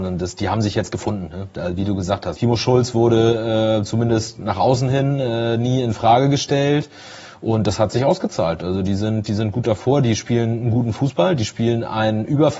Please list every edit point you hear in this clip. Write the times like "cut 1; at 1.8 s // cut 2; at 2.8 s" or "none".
none